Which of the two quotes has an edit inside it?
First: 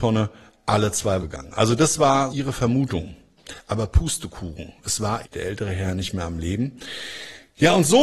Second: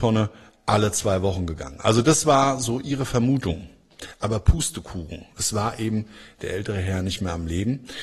first; 3 cuts; at 1.2 s, 2.3 s, 5.2 s

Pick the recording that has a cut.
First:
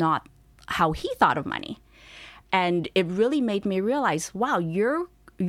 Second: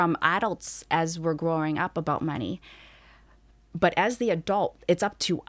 first; 1 cut; at 2.4 s

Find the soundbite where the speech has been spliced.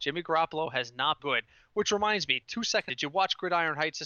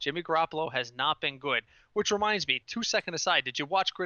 first; 2 cuts; at 1.2 s, 2.9 s

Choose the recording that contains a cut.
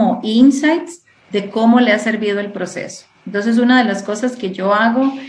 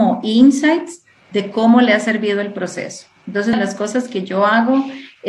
second; 1 cut; at 3.5 s

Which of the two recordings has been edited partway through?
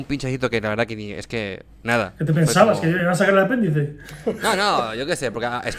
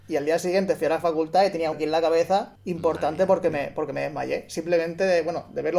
second; 2 cuts; at 1.7 s, 2.6 s

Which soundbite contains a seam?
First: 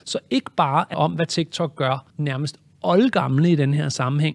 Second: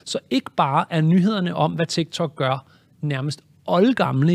first; 2 cuts; at 0.9 s, 2.1 s

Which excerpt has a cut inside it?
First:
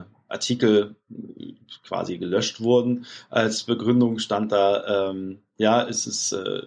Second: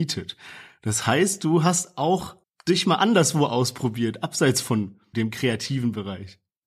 second; 1 cut; at 2.4 s

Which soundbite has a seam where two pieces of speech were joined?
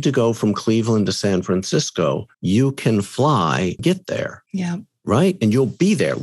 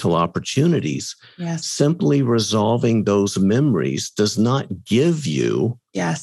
first; 3 cuts; at 2.3 s, 3.8 s, 4.5 s

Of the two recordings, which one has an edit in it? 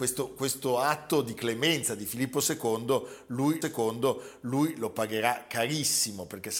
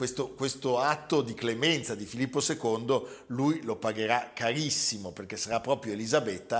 first; 1 cut; at 3.6 s

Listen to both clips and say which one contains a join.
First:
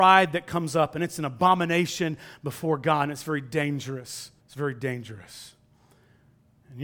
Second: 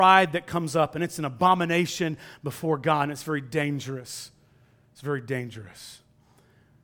first; 1 cut; at 4.4 s

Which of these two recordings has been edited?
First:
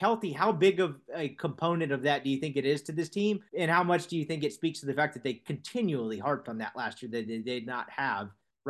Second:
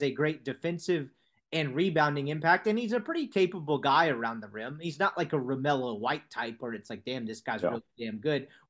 first; 1 cut; at 3.5 s

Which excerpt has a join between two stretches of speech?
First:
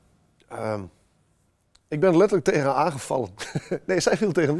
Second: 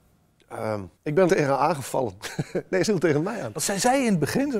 second; 3 cuts; at 0.9 s, 1.3 s, 2.8 s

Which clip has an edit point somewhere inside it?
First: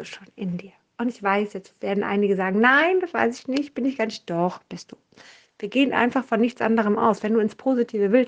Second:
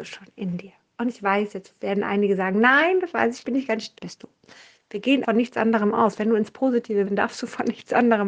second; 4 cuts; at 3.4 s, 4.0 s, 5.2 s, 7.0 s

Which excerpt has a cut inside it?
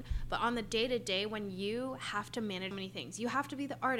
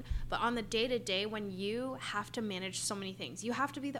first; 1 cut; at 2.7 s

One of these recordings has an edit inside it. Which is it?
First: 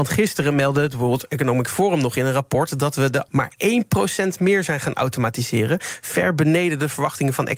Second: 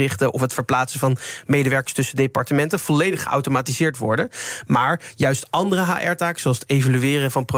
first; 1 cut; at 3.3 s

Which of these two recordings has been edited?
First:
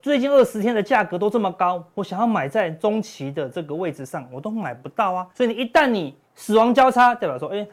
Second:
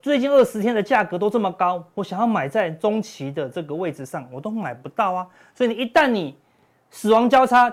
first; 2 cuts; at 5.3 s, 6.2 s

